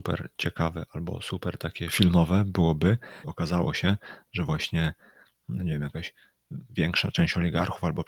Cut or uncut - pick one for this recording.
cut